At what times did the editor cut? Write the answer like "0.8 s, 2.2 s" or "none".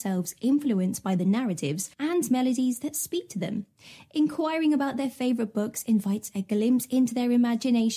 1.9 s